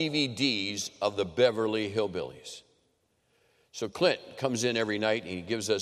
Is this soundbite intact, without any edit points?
yes; 0 cuts

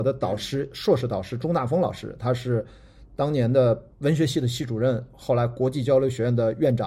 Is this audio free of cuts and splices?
no; 1 cut; at 3.9 s

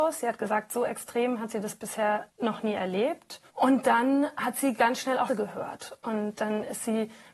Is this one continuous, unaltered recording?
no; 3 cuts; at 2.3 s, 3.5 s, 5.3 s

